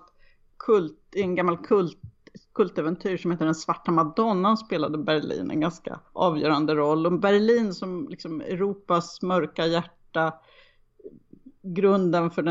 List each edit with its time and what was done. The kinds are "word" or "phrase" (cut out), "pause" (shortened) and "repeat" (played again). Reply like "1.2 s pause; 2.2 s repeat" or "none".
6.0 s pause